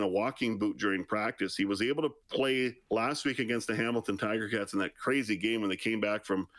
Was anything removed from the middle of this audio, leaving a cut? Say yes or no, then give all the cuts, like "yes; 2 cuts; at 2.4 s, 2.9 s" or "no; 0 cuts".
yes; 1 cut; at 2.2 s